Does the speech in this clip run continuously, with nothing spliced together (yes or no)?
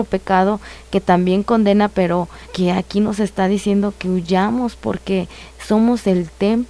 no